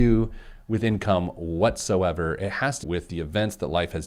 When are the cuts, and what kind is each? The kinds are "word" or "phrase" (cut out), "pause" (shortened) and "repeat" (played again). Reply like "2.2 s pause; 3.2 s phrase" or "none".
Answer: 2.8 s word